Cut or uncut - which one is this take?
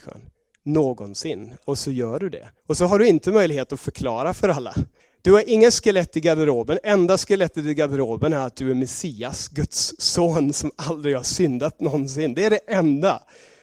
cut